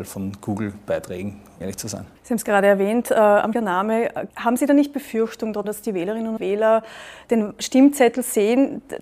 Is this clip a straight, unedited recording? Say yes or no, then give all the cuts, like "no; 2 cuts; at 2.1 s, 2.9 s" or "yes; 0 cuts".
no; 6 cuts; at 1.6 s, 2.2 s, 3.5 s, 4.3 s, 5.6 s, 6.4 s